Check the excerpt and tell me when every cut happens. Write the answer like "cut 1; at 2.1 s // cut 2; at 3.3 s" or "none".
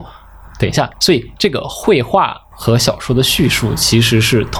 cut 1; at 0.9 s // cut 2; at 2.5 s